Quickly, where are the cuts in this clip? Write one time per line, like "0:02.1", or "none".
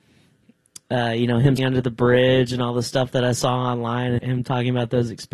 0:01.6
0:04.2